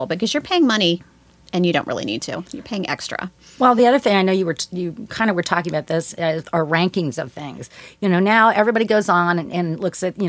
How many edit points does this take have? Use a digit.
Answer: 0